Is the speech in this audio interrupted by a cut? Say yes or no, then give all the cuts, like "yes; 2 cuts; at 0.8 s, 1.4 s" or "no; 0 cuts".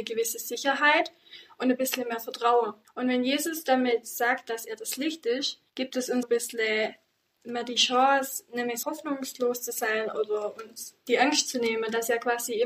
yes; 4 cuts; at 2.8 s, 5.7 s, 6.2 s, 8.8 s